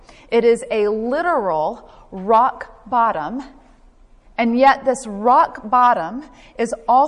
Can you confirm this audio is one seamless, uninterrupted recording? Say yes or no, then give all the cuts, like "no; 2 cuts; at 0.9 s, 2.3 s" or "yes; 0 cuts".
yes; 0 cuts